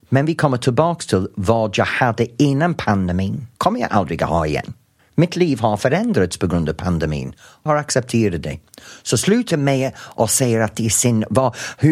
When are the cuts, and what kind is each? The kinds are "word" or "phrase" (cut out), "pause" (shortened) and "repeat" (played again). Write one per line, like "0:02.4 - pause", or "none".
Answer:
0:03.5 - pause
0:05.0 - pause
0:07.7 - word
0:09.5 - word